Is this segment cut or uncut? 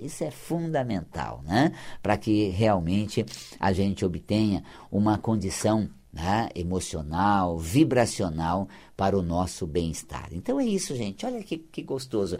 uncut